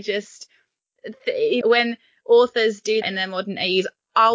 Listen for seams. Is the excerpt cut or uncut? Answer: cut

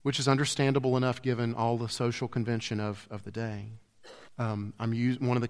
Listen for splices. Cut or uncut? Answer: cut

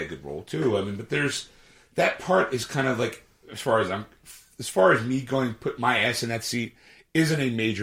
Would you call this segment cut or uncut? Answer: uncut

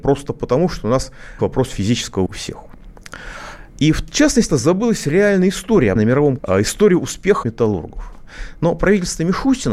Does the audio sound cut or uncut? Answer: cut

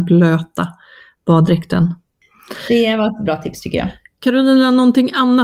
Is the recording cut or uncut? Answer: cut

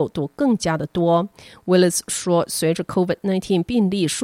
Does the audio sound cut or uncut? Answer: uncut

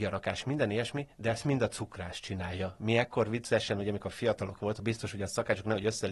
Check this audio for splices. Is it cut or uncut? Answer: cut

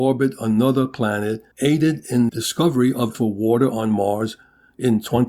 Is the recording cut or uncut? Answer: cut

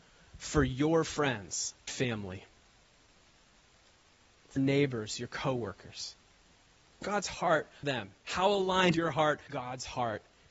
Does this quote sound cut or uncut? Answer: cut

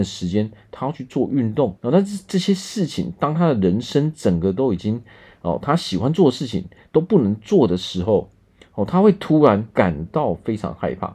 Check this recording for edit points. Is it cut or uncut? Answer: cut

